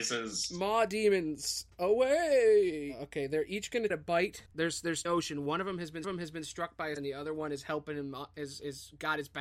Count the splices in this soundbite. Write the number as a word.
five